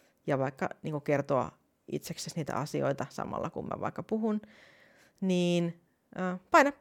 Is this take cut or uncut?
uncut